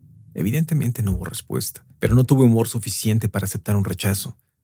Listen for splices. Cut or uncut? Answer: cut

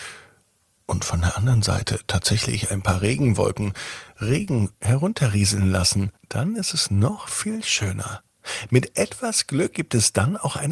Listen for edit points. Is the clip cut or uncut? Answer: cut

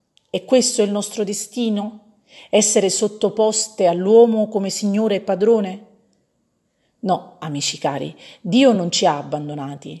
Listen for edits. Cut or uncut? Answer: uncut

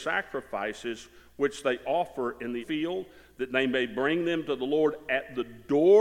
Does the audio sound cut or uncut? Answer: cut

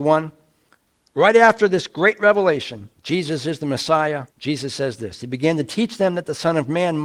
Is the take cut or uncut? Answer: cut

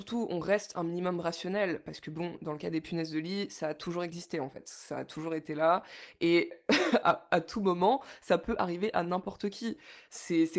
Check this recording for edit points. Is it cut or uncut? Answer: uncut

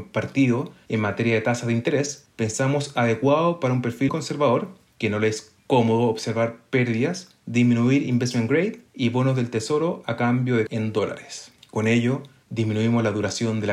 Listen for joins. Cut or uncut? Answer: cut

